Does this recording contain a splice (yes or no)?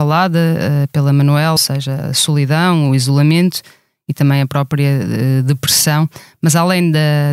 yes